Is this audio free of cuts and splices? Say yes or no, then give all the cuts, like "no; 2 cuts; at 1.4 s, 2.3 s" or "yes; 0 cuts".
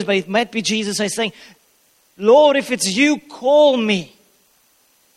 yes; 0 cuts